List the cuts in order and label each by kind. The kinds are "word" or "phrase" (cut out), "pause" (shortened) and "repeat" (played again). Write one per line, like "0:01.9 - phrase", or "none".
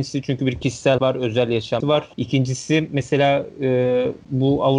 0:01.0 - word
0:01.8 - word
0:02.1 - pause